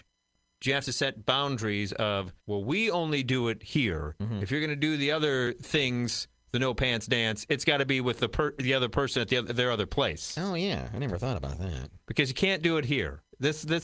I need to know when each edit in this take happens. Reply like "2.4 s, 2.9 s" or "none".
2.4 s